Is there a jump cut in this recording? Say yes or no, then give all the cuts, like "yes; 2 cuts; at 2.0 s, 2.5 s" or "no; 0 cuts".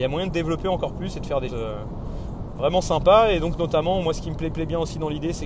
yes; 2 cuts; at 1.5 s, 4.5 s